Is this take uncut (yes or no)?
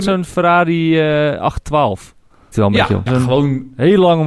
no